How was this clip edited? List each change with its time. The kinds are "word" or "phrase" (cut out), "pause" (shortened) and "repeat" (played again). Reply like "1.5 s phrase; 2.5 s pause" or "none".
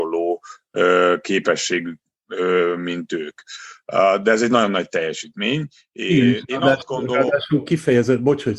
none